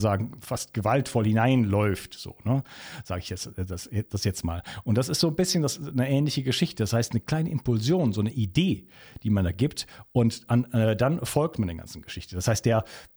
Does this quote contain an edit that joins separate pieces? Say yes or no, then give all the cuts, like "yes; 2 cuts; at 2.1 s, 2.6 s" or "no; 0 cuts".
no; 0 cuts